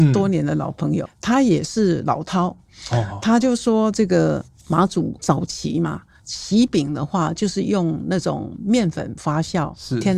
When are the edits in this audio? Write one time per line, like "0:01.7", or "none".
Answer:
none

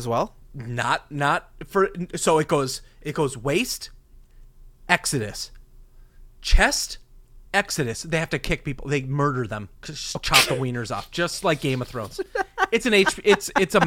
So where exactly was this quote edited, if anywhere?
0:07.5
0:09.8

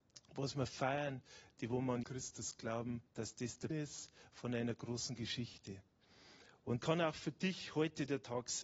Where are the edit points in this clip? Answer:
0:02.0
0:03.1
0:03.7
0:06.8

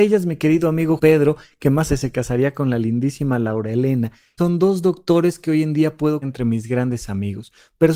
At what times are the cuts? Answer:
0:01.0
0:01.9
0:04.4
0:06.2

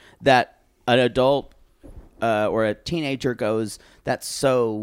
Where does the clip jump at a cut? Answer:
none

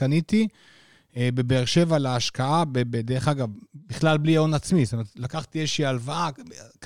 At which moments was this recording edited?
none

